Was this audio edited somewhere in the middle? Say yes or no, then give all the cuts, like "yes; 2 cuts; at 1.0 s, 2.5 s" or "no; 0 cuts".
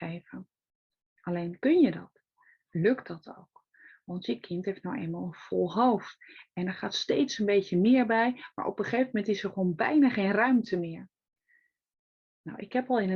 no; 0 cuts